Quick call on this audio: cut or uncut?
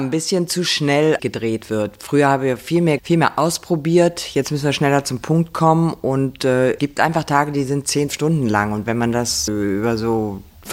cut